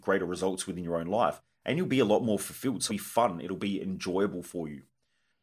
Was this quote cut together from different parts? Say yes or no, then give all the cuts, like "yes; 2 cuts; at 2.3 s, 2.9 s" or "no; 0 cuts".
yes; 1 cut; at 2.9 s